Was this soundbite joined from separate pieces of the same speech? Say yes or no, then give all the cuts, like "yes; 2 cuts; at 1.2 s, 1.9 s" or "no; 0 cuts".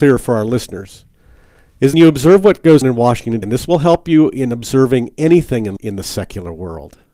yes; 4 cuts; at 1.9 s, 2.8 s, 3.4 s, 5.8 s